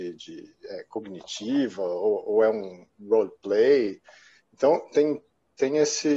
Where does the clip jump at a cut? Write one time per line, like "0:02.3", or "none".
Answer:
none